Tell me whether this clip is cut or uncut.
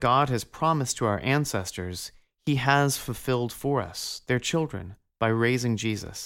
uncut